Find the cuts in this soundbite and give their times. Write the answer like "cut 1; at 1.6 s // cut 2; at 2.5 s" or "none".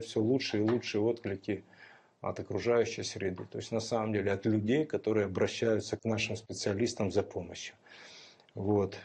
none